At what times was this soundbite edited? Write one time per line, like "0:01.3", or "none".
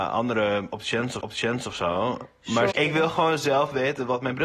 0:01.2
0:02.7